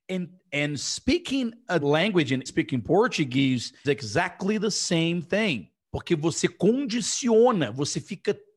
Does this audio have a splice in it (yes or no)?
yes